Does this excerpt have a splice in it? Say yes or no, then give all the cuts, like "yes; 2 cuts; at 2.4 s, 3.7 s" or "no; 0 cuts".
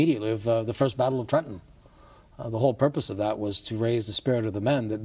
no; 0 cuts